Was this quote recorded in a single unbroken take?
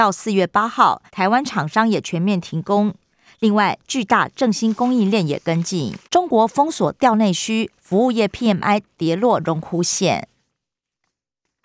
no; 2 cuts; at 1.1 s, 6.0 s

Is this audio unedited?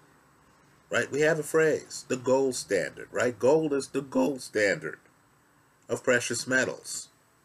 yes; 0 cuts

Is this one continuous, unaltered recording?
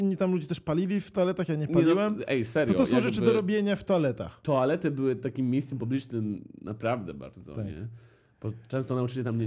yes; 0 cuts

